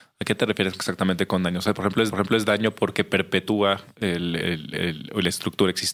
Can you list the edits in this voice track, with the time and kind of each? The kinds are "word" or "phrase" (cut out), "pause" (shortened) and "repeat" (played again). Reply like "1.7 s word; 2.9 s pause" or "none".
2.1 s repeat; 4.7 s repeat

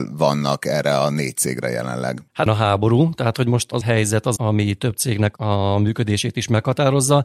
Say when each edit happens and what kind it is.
2.5 s word; 3.8 s word; 4.4 s word

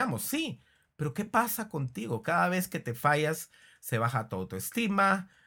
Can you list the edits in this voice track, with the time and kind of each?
none

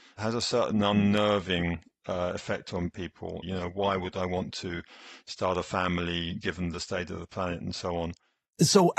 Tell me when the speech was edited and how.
none

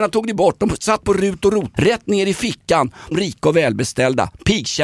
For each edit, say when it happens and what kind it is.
1.0 s word; 1.7 s word; 3.1 s phrase

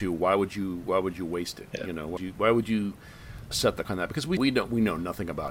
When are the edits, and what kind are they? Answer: 2.2 s word; 3.5 s word; 3.8 s word; 4.4 s word

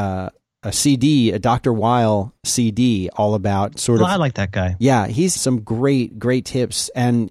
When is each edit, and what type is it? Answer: 5.4 s phrase

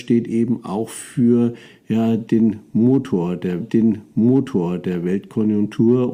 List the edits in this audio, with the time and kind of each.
3.6 s repeat

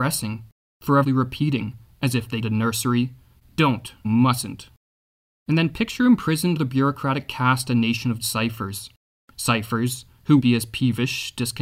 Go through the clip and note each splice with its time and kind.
1.0 s word; 2.4 s word; 4.0 s word; 6.6 s word; 8.2 s word; 10.4 s word

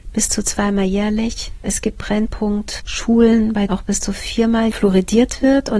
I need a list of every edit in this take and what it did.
3.7 s word; 4.7 s word

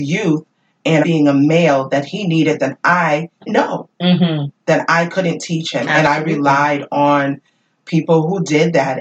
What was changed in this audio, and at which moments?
1.0 s word; 3.5 s word

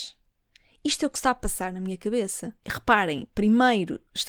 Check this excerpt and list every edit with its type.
2.6 s pause

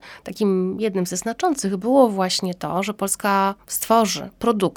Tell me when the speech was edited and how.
none

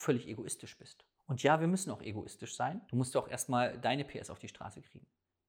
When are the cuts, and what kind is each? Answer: 2.9 s pause

